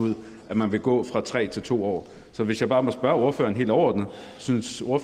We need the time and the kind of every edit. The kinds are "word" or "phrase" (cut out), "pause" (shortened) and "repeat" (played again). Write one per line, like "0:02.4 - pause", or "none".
none